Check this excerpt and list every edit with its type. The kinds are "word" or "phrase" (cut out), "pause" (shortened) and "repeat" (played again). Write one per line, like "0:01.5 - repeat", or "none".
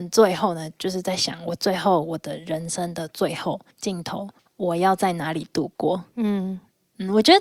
0:03.7 - pause
0:04.4 - pause
0:06.1 - pause